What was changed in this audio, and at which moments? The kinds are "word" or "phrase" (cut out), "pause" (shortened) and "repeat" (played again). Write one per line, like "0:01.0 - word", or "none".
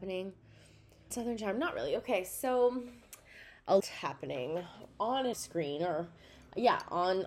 0:01.1 - word
0:03.8 - word
0:05.3 - word